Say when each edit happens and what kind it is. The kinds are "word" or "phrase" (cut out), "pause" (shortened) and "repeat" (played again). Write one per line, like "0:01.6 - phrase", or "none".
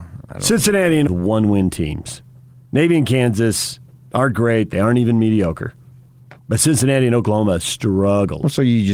0:01.1 - phrase
0:06.4 - pause